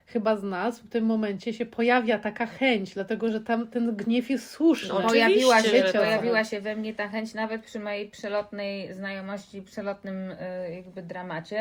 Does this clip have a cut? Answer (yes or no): no